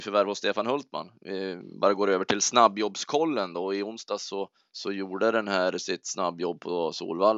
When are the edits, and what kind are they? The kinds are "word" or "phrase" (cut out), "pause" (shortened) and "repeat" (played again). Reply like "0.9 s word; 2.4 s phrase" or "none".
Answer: 4.5 s pause